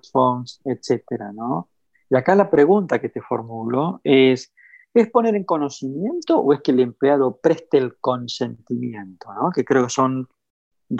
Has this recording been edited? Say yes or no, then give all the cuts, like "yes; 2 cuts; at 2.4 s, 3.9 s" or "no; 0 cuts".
no; 0 cuts